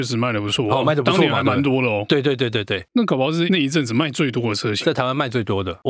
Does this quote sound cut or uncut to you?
cut